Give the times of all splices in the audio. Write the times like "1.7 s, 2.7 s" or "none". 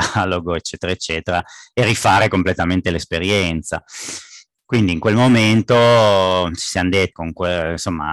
7.1 s